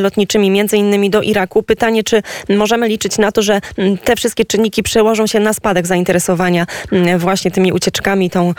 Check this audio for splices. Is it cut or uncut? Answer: uncut